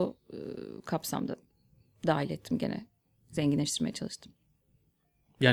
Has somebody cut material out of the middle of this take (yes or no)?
no